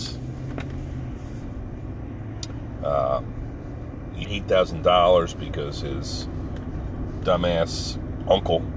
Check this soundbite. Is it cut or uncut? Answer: cut